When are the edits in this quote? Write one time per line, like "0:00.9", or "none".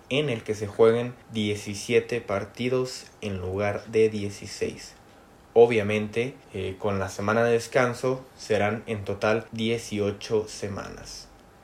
0:01.2
0:06.4
0:09.5